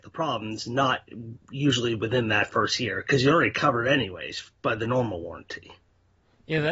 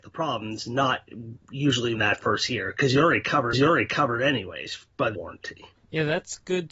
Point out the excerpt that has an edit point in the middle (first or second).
second